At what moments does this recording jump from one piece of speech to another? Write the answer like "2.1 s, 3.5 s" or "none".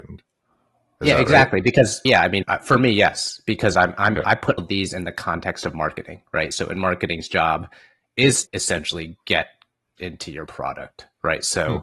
2.0 s, 2.4 s, 4.6 s, 8.4 s, 10.0 s